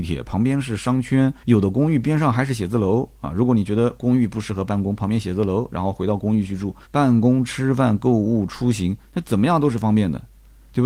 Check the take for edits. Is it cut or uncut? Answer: cut